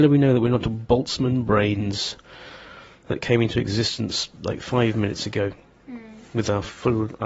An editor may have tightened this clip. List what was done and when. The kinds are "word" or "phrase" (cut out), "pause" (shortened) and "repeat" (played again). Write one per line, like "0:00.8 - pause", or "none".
none